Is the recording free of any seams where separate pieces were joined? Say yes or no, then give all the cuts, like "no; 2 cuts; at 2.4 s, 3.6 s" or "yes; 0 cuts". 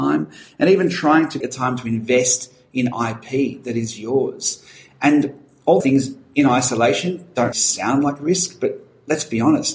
no; 3 cuts; at 1.4 s, 5.8 s, 7.5 s